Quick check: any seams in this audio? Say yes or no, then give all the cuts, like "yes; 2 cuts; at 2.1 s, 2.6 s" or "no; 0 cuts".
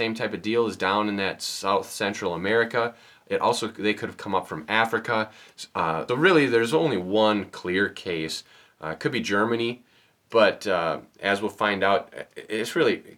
yes; 1 cut; at 6.1 s